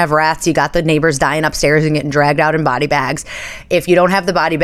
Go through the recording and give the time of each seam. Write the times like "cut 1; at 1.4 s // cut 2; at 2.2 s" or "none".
none